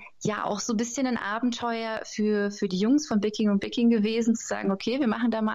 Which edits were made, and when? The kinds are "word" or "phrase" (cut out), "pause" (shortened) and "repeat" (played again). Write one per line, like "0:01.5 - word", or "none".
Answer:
none